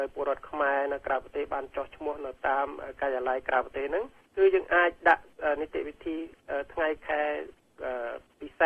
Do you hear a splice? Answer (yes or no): yes